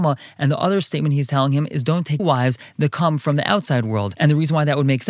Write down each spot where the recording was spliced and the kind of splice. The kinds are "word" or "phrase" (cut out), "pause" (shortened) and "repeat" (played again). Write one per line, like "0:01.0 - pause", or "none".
0:02.2 - word